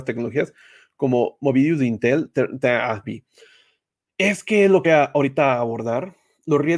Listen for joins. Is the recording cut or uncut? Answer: cut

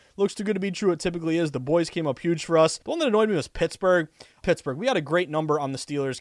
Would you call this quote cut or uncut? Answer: cut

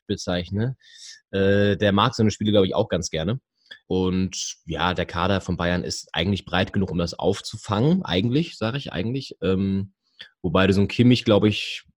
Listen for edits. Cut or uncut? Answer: uncut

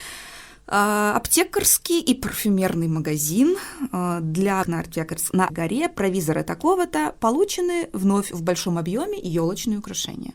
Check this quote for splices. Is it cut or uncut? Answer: cut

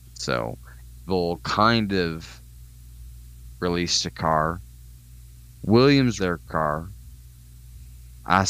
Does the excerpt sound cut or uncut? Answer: cut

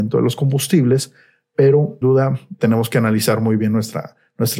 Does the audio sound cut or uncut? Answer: cut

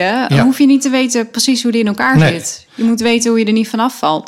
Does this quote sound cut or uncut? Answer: uncut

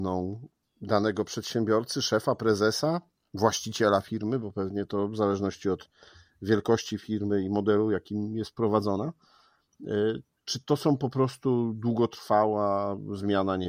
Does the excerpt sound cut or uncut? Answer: uncut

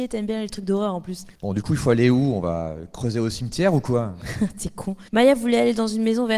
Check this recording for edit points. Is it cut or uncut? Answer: cut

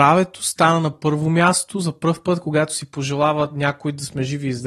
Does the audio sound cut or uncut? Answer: uncut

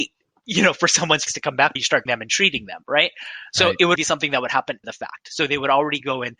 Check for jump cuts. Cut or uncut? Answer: cut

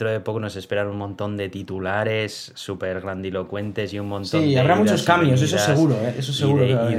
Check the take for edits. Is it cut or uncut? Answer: uncut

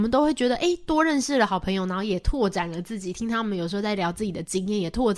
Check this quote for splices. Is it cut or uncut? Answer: uncut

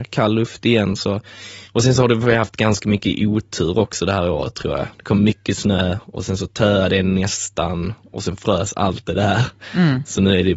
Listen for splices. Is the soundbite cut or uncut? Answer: cut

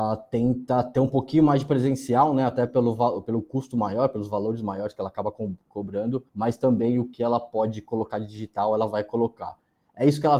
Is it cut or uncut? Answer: cut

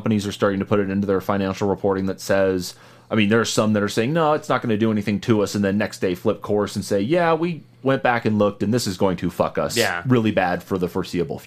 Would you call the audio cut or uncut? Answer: uncut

